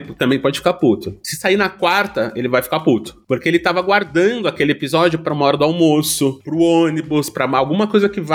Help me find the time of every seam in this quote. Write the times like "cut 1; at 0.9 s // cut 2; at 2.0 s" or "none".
none